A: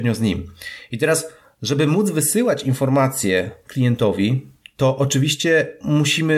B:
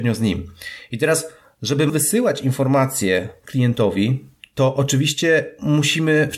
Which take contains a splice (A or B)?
B